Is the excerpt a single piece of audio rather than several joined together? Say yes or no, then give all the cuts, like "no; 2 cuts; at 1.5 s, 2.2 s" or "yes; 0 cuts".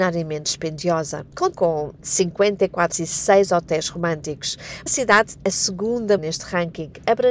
no; 5 cuts; at 1.5 s, 2.9 s, 4.9 s, 5.4 s, 6.2 s